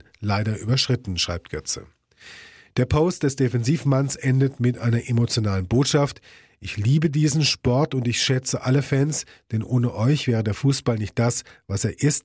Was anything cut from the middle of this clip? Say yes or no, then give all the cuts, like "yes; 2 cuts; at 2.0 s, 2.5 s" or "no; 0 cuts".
no; 0 cuts